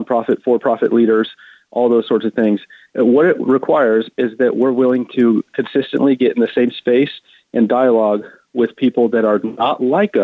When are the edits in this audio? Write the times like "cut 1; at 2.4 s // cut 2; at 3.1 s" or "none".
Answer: none